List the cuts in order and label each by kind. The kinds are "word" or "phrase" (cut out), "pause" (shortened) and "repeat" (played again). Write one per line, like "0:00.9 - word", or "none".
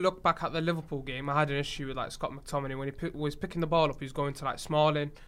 none